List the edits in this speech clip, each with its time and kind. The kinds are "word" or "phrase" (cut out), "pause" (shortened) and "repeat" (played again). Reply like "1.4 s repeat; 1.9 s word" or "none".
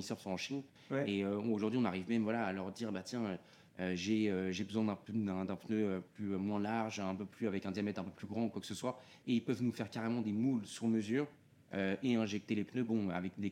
none